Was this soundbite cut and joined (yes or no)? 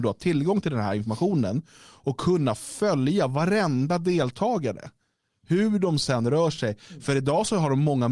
no